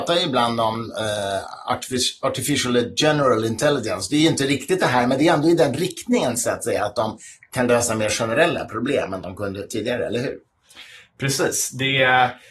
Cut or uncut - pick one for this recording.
uncut